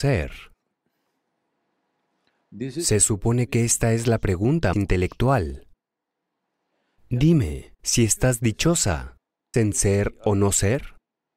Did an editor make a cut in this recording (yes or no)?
yes